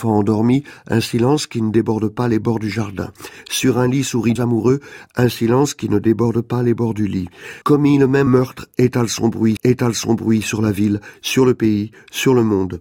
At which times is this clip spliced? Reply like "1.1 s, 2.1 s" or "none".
4.4 s, 7.6 s, 8.3 s, 9.6 s